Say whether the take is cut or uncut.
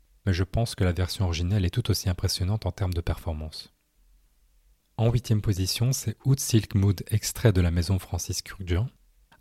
uncut